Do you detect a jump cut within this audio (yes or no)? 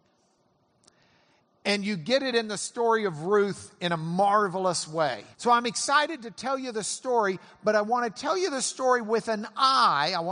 yes